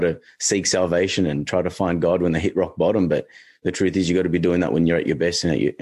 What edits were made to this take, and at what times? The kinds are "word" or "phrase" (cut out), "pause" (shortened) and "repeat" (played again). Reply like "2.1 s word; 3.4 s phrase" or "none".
none